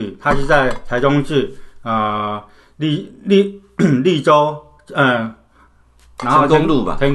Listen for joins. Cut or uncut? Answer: uncut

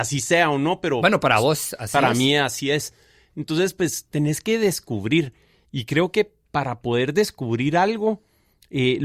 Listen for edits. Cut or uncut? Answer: uncut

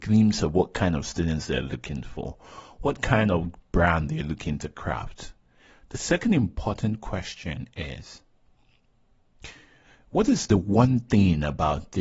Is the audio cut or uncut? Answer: uncut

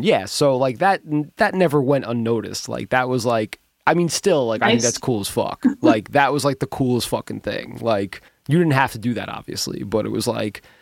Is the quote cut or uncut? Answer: cut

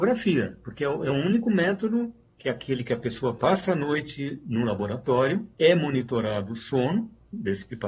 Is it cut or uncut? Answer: cut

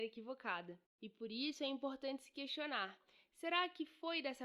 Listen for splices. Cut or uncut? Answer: uncut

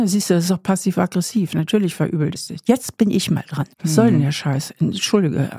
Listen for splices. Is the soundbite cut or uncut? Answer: cut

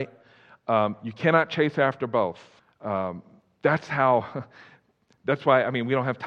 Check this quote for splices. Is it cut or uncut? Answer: cut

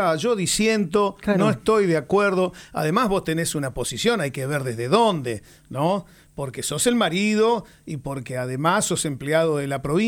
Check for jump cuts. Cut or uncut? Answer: uncut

